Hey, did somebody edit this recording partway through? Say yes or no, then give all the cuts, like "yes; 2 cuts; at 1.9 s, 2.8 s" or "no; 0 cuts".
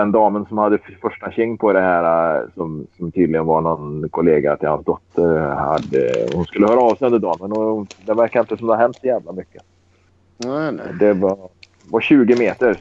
no; 0 cuts